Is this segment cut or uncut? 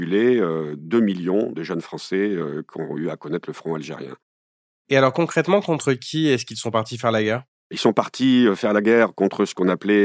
uncut